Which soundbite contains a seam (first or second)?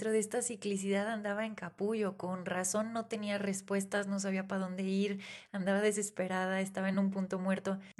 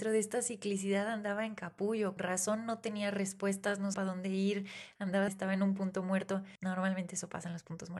second